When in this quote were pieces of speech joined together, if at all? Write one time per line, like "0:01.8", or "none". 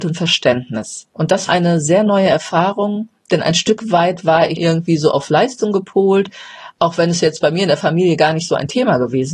0:01.1
0:01.5
0:04.6